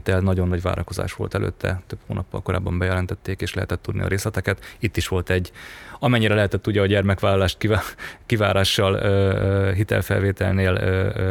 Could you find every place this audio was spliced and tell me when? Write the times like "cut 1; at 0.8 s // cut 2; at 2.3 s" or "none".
none